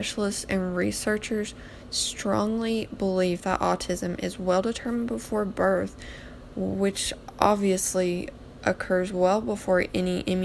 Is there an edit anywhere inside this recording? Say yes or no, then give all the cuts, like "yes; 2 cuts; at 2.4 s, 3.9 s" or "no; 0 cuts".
no; 0 cuts